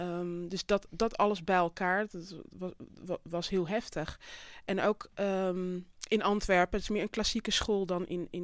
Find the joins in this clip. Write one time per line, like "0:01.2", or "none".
none